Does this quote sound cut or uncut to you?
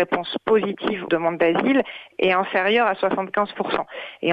cut